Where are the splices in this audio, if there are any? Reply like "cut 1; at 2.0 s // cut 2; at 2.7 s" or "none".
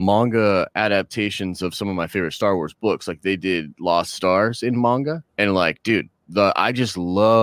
cut 1; at 5.3 s